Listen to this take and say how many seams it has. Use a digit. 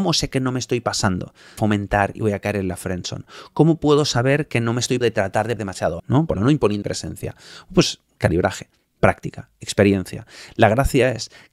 6